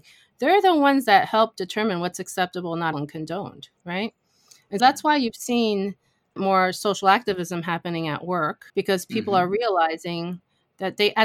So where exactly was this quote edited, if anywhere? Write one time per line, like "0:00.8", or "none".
0:02.9
0:03.8
0:04.8
0:06.4
0:08.7